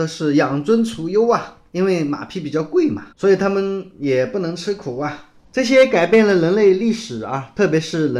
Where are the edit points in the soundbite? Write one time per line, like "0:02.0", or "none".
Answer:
0:03.1